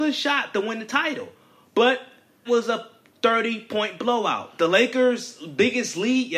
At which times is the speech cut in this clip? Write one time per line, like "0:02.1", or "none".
0:02.5

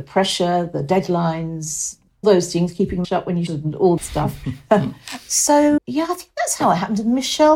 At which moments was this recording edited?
0:02.2
0:03.0
0:03.5
0:04.0
0:05.8

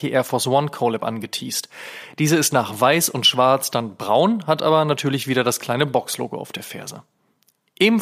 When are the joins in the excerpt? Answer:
none

